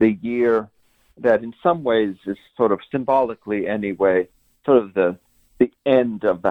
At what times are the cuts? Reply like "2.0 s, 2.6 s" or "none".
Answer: none

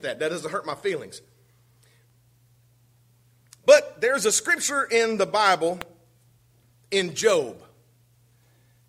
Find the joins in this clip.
none

